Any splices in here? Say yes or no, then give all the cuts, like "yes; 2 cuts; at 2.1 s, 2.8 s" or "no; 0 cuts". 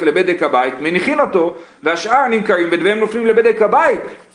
no; 0 cuts